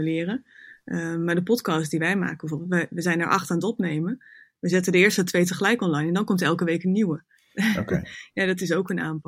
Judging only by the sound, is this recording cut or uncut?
uncut